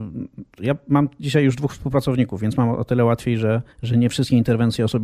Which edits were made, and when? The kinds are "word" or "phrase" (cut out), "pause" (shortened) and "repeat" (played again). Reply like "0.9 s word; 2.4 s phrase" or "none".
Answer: 3.7 s pause